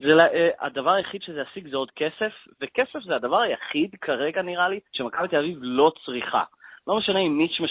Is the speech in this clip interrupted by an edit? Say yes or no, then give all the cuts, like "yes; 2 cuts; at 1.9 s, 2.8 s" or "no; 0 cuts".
yes; 1 cut; at 4.9 s